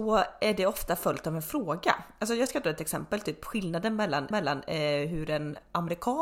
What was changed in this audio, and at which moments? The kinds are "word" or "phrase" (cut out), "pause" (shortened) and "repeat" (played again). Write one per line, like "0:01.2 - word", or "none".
0:04.3 - repeat